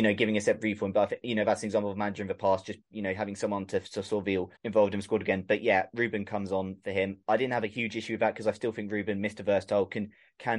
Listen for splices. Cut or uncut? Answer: cut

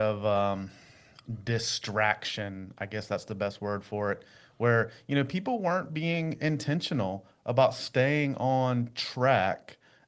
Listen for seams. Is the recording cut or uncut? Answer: uncut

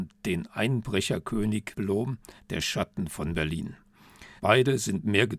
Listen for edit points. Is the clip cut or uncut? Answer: cut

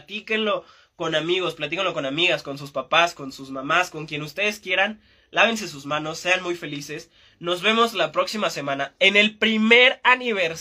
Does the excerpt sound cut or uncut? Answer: uncut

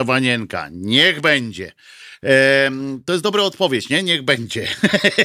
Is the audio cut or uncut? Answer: uncut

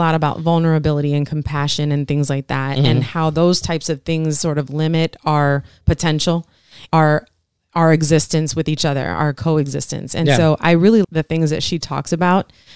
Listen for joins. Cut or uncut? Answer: cut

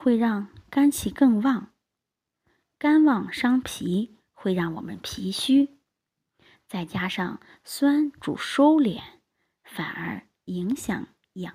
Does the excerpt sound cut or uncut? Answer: uncut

